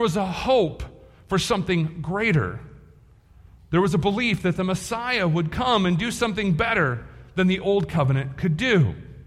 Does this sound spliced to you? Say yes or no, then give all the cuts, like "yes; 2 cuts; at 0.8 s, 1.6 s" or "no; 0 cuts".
no; 0 cuts